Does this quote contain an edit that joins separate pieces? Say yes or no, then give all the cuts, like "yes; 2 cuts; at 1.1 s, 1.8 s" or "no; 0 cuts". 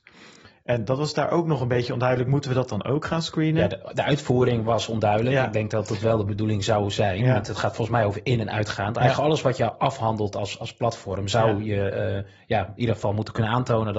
no; 0 cuts